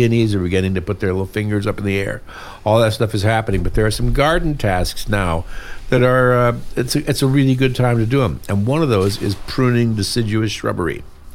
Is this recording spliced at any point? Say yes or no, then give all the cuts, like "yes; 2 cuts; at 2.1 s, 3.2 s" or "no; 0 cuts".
no; 0 cuts